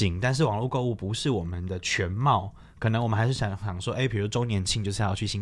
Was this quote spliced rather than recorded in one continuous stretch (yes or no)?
no